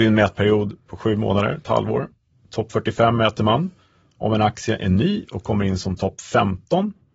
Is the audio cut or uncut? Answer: uncut